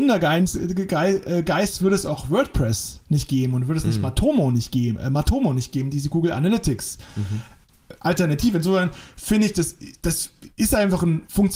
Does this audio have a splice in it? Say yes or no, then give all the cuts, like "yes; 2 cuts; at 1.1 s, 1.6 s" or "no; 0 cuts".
no; 0 cuts